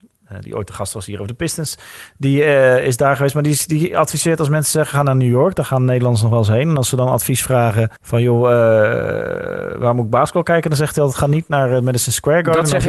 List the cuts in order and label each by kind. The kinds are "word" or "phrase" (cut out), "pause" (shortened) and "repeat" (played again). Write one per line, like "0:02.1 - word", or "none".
0:08.0 - pause